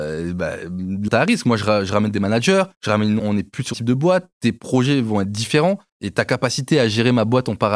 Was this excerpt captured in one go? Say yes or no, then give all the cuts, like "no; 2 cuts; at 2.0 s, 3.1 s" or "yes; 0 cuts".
no; 6 cuts; at 1.1 s, 2.7 s, 3.2 s, 3.7 s, 4.3 s, 5.9 s